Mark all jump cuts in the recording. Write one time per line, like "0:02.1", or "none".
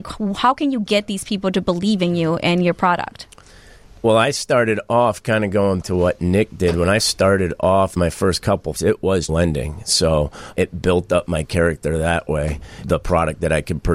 0:04.0
0:05.8
0:07.0
0:08.0
0:08.7
0:09.3
0:10.5
0:12.8